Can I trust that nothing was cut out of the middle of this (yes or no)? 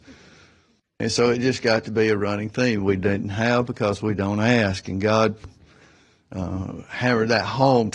yes